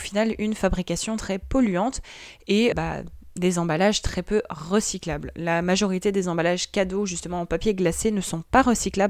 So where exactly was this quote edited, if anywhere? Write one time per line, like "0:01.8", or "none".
0:02.7

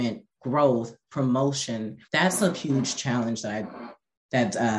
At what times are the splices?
0:02.0

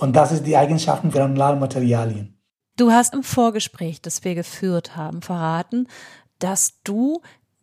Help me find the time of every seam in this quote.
0:01.1
0:03.1

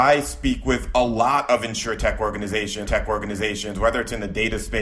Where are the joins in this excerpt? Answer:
0:02.9

